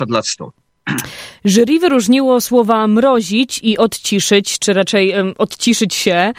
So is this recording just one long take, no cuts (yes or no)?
yes